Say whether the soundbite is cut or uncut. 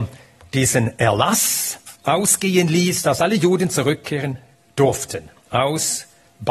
cut